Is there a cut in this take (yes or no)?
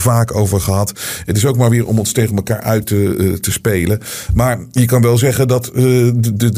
no